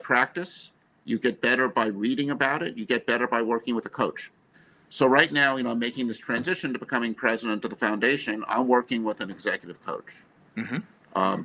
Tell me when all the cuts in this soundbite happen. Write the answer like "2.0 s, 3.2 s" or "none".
4.5 s